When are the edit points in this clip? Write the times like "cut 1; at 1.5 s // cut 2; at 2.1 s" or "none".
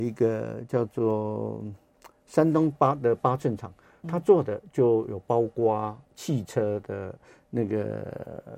cut 1; at 6.1 s